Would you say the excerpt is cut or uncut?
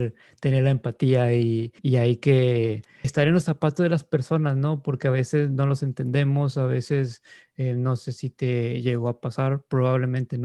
cut